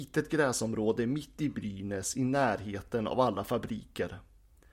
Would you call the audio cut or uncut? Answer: uncut